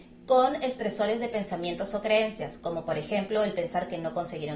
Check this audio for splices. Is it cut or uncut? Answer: uncut